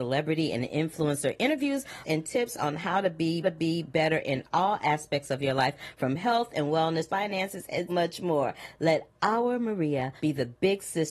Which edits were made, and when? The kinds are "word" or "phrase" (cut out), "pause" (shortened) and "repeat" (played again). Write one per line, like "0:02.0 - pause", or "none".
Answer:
0:02.0 - phrase
0:03.4 - repeat
0:07.1 - phrase
0:07.9 - word
0:10.2 - pause